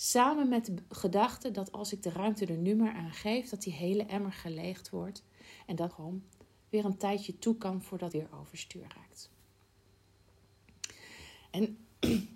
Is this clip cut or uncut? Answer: cut